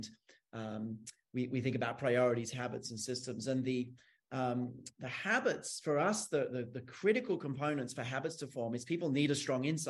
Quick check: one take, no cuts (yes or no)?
yes